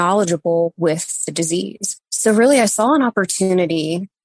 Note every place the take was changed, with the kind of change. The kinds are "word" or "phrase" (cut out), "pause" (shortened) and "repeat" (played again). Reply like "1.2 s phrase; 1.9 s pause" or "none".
2.0 s pause